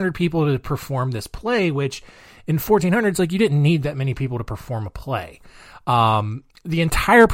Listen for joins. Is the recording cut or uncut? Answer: uncut